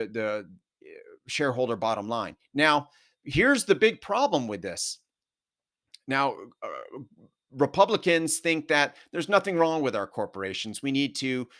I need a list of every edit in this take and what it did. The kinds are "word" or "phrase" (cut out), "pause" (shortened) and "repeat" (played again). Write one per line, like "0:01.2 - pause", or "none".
none